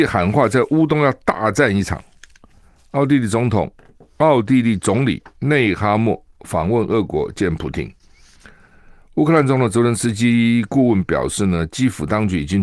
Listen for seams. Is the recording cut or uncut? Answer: uncut